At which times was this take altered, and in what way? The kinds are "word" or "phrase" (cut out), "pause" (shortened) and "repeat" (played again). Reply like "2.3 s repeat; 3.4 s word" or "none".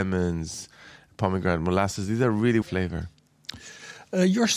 2.6 s phrase